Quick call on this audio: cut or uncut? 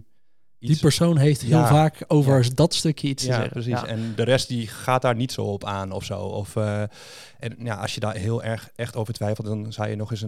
cut